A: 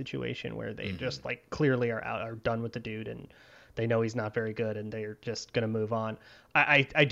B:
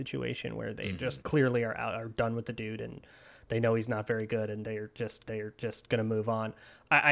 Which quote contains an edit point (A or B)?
B